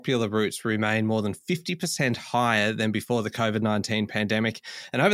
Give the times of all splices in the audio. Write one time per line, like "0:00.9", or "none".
none